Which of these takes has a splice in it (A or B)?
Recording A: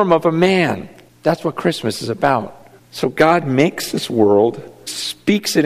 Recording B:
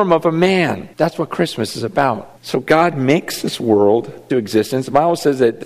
B